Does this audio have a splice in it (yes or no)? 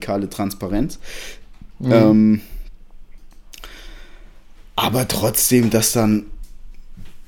no